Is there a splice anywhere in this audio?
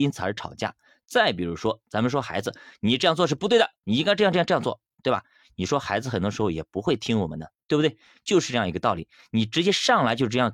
no; 0 cuts

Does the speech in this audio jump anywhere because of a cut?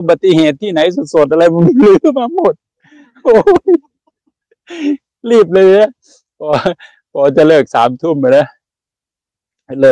no; 0 cuts

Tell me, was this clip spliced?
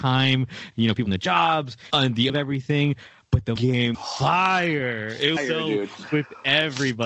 yes; 6 cuts; at 1.1 s, 1.9 s, 2.3 s, 3.6 s, 3.9 s, 5.4 s

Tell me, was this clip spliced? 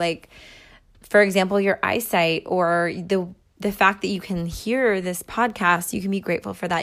no; 0 cuts

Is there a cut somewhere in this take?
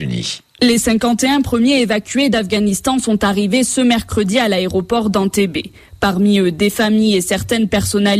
no; 0 cuts

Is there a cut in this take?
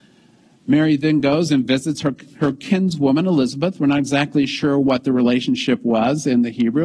no; 0 cuts

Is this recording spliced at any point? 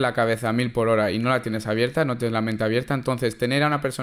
no; 0 cuts

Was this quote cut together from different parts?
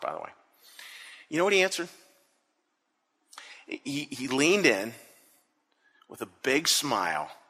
no; 0 cuts

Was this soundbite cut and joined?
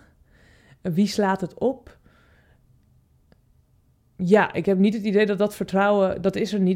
no; 0 cuts

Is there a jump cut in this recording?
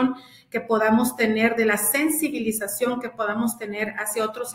no; 0 cuts

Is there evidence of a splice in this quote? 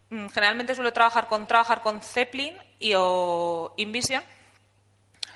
yes; 1 cut; at 1.5 s

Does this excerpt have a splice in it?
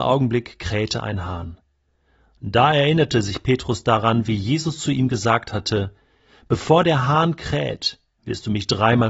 no; 0 cuts

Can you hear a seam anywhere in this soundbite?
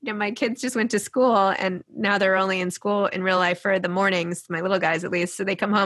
no; 0 cuts

